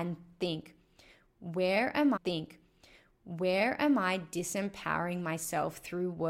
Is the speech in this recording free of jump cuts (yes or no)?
no